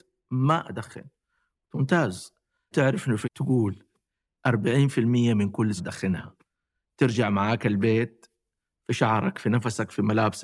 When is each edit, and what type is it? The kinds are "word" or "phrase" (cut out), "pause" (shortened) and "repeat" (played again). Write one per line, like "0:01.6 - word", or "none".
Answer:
0:02.7 - word
0:03.2 - word
0:05.8 - word